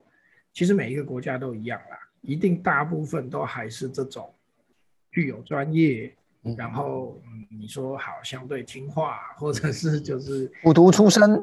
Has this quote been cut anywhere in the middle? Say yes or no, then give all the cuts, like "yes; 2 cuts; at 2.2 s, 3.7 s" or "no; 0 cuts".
no; 0 cuts